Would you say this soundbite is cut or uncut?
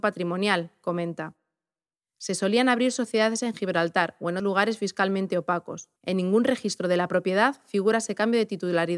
cut